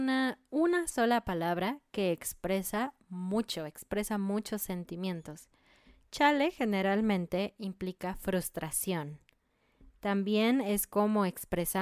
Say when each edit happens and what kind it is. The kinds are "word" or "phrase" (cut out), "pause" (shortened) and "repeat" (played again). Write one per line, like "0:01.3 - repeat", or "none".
none